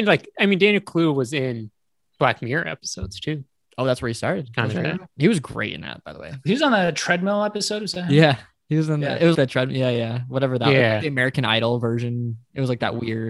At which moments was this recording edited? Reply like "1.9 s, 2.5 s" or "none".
5.1 s, 9.3 s